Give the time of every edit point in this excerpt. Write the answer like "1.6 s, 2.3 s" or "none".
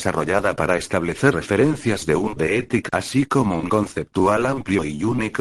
1.3 s, 2.4 s, 2.9 s, 3.7 s